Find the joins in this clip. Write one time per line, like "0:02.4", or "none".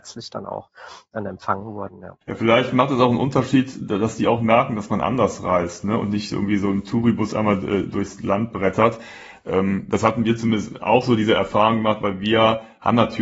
0:02.2